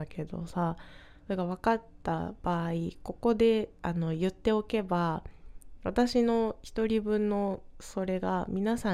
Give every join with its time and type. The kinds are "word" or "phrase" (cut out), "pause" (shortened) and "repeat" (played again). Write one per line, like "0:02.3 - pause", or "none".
0:01.2 - pause